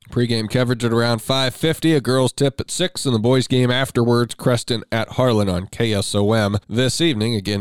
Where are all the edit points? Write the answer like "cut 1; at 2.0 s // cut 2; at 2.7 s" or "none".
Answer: cut 1; at 6.6 s

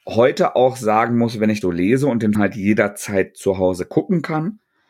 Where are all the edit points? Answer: cut 1; at 1.6 s // cut 2; at 2.3 s

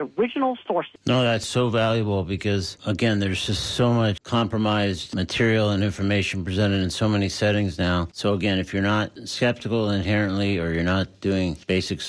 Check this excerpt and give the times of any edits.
none

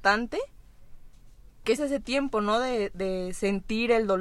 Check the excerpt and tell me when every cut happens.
cut 1; at 1.8 s

